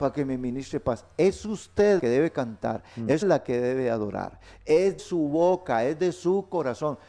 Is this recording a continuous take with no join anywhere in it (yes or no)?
no